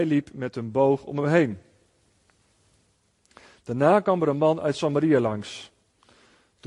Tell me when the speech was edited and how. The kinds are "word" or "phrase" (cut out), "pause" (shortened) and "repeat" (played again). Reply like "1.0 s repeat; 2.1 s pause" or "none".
none